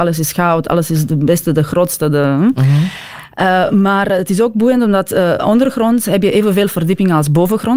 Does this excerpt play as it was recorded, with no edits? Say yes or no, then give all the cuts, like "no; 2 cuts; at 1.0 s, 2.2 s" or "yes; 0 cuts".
yes; 0 cuts